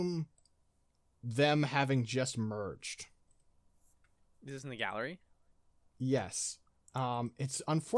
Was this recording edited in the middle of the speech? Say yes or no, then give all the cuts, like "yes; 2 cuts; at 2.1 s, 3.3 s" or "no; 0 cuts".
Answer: no; 0 cuts